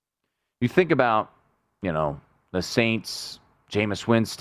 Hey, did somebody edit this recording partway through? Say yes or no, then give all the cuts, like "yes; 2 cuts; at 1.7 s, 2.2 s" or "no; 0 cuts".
no; 0 cuts